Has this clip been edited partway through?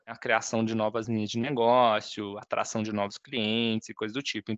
no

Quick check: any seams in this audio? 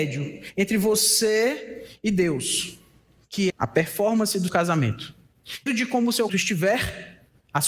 yes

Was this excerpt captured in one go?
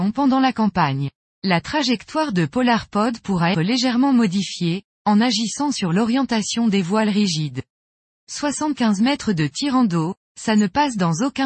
no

